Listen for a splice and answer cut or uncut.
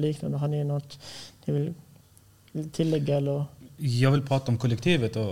uncut